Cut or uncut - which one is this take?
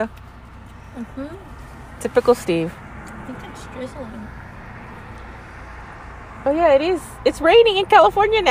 uncut